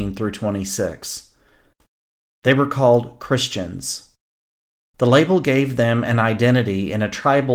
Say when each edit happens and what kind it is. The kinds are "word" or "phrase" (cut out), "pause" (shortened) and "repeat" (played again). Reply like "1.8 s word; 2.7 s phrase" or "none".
none